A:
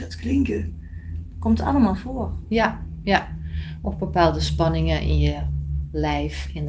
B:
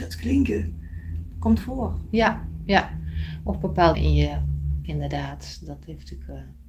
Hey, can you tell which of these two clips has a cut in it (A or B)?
B